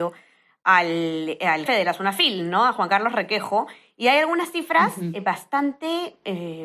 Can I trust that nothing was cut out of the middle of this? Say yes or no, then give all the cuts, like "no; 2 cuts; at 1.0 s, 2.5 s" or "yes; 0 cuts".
no; 1 cut; at 1.7 s